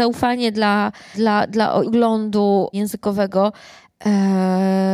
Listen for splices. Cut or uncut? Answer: cut